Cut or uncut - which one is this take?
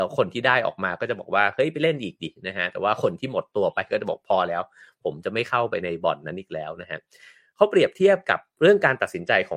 uncut